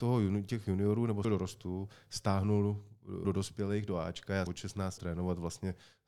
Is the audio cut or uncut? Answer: cut